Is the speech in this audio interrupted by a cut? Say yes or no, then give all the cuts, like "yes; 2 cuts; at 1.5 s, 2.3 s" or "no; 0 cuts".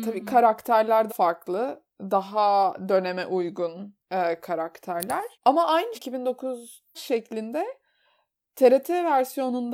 yes; 6 cuts; at 1.1 s, 1.9 s, 4.0 s, 5.3 s, 5.9 s, 6.9 s